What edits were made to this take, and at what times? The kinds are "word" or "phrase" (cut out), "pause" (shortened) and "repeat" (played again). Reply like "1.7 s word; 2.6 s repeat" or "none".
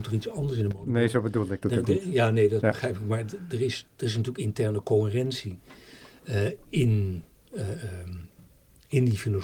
none